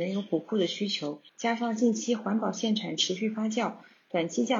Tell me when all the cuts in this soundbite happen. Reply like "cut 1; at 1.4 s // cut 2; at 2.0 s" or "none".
cut 1; at 1.3 s